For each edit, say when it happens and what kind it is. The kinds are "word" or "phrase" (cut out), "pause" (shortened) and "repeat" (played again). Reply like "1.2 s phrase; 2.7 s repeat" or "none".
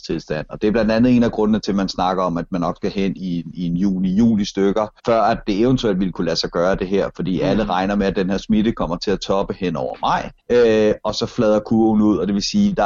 5.0 s pause; 10.4 s pause

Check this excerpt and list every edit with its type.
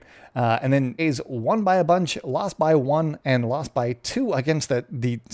1.0 s word

